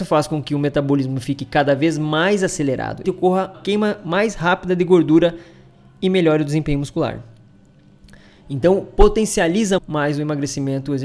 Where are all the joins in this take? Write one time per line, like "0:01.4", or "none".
0:03.0
0:03.5
0:09.8

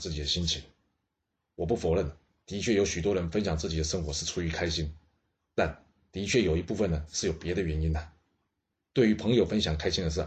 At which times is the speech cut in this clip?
none

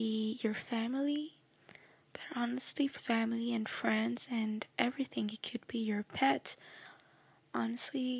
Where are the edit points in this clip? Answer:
0:03.0

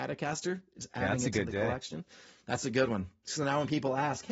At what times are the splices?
none

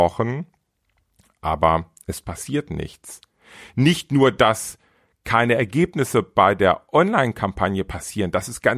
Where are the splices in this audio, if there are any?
none

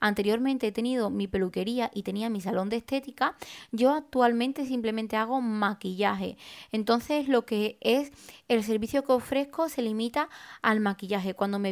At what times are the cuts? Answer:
none

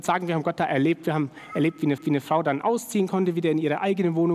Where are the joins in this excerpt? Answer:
0:02.0

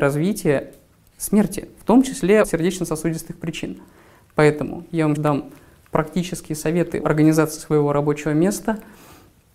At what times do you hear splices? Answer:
0:02.4
0:05.2
0:07.0

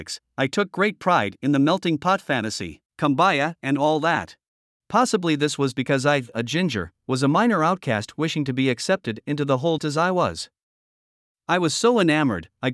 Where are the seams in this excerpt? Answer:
0:02.9
0:04.7
0:09.8

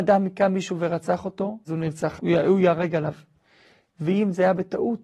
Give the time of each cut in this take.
0:01.7
0:02.2

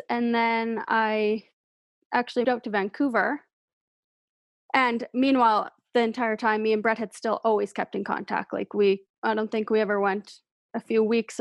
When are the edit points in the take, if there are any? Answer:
0:02.4
0:09.2

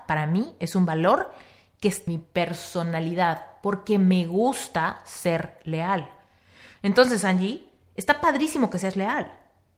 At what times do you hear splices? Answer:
0:02.1

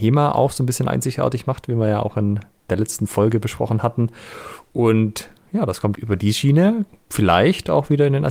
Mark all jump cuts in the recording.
0:05.9

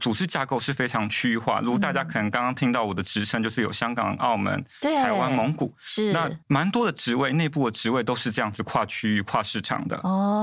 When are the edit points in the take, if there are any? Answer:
0:06.4

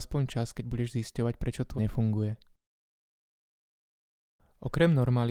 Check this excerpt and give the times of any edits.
0:01.8

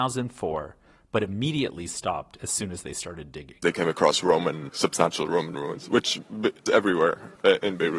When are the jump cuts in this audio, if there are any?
0:04.7
0:06.7

